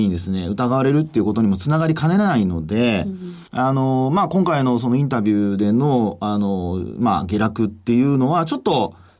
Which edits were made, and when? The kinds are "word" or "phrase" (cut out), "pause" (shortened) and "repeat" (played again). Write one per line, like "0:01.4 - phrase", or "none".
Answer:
0:03.5 - pause